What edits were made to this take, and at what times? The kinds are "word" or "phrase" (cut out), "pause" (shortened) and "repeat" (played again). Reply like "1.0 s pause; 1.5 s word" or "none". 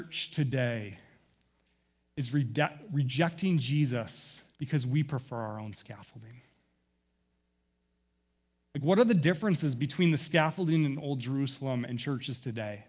4.5 s pause